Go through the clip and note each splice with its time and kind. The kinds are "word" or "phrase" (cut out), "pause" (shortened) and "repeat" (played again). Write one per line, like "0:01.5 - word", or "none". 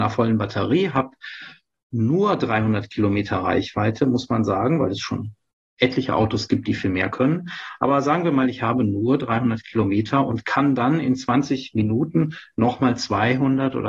none